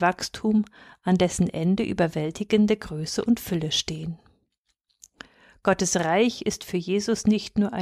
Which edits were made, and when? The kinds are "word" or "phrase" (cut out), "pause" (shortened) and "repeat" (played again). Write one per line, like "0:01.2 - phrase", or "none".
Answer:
none